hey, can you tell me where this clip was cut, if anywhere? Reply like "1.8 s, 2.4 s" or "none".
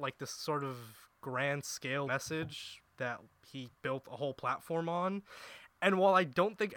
2.1 s, 3.7 s